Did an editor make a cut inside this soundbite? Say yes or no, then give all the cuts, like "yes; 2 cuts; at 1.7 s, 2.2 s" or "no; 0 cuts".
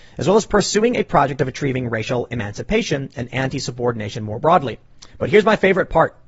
yes; 1 cut; at 5.1 s